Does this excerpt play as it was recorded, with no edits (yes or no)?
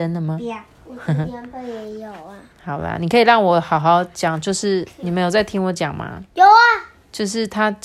yes